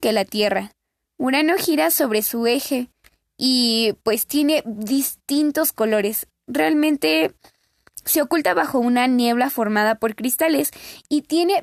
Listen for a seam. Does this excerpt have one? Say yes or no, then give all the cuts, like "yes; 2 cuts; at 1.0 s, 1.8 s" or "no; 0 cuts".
no; 0 cuts